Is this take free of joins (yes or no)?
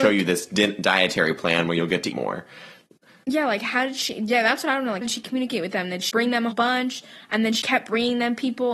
no